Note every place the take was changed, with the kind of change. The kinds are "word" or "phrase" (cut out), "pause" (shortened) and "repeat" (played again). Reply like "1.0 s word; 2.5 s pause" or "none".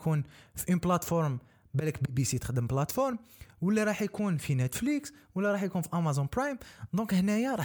none